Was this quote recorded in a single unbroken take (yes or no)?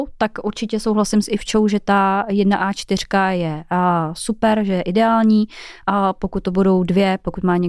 yes